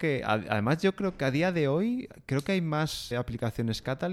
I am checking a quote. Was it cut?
yes; 1 cut; at 3.1 s

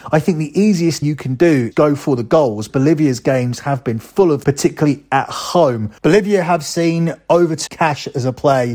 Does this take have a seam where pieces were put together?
yes; 6 cuts; at 1.0 s, 1.7 s, 2.7 s, 4.4 s, 6.0 s, 7.7 s

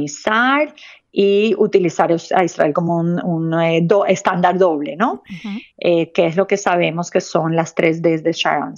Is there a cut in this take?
no; 0 cuts

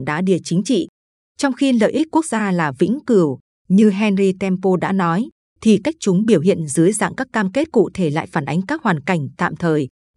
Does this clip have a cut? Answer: no; 0 cuts

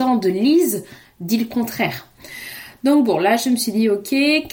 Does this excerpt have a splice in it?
no; 0 cuts

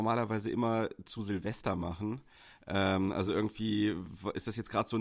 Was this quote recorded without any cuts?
yes; 0 cuts

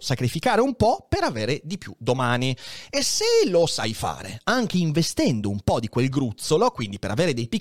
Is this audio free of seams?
yes; 0 cuts

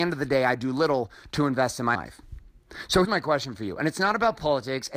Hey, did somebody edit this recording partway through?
yes; 2 cuts; at 1.9 s, 3.0 s

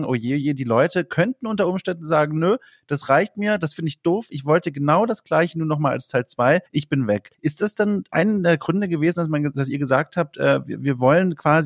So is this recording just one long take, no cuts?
no; 2 cuts; at 6.7 s, 7.3 s

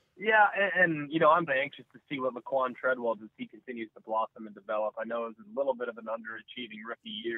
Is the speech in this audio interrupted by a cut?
yes; 2 cuts; at 1.5 s, 3.2 s

